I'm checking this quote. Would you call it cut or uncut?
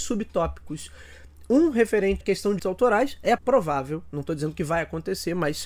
cut